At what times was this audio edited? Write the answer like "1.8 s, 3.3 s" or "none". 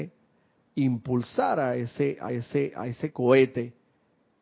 2.3 s